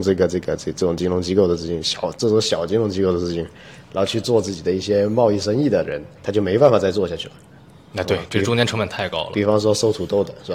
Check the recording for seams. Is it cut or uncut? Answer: uncut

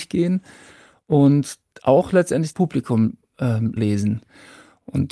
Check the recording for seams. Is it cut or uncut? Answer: cut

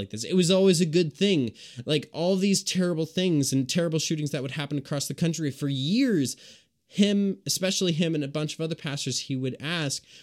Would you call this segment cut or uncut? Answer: uncut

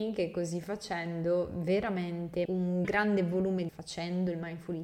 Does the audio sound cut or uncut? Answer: cut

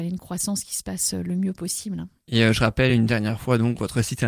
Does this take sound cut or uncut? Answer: uncut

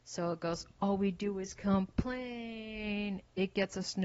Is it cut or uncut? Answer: uncut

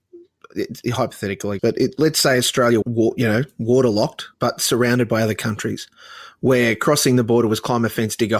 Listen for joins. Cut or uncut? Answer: cut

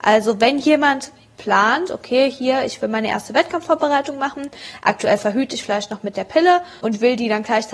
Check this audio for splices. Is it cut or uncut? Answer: uncut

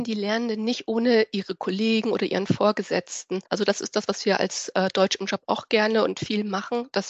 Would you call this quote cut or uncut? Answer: cut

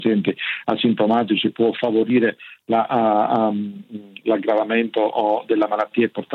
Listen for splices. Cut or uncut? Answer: uncut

